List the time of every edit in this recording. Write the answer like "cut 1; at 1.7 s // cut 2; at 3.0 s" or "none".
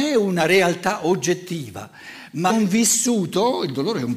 cut 1; at 2.5 s